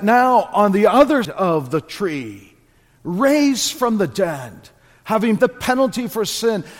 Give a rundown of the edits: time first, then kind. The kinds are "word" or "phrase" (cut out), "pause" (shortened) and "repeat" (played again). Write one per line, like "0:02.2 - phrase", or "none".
0:01.2 - word
0:05.4 - word